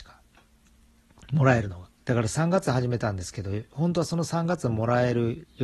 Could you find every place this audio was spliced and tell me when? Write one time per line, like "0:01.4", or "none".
0:02.0